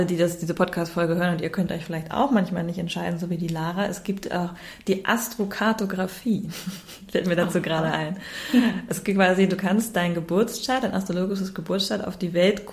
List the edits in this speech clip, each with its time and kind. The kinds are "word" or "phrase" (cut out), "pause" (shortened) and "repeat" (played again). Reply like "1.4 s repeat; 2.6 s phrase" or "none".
none